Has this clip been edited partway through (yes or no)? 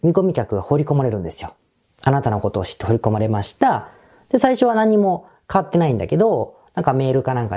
no